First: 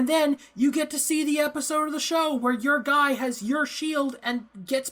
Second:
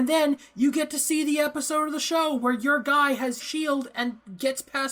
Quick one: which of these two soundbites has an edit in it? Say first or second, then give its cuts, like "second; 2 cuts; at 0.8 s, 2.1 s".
second; 1 cut; at 3.4 s